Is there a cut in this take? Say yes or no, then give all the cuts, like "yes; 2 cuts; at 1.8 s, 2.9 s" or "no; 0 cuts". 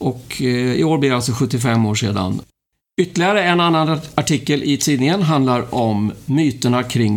no; 0 cuts